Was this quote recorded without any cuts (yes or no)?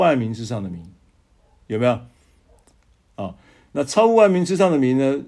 yes